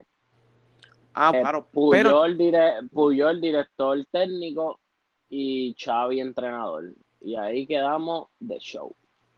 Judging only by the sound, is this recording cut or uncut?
cut